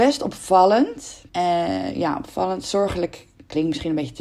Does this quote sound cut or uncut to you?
cut